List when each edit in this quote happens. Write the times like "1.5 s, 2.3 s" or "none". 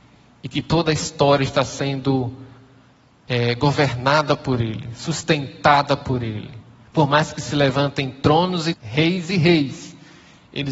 8.7 s